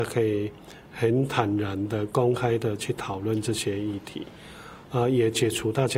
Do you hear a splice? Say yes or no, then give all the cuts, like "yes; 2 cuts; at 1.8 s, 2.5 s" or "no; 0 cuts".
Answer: no; 0 cuts